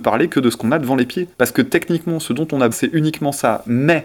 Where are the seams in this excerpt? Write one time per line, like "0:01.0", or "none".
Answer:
0:01.3
0:02.7